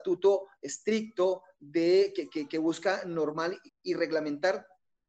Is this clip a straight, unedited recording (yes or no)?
no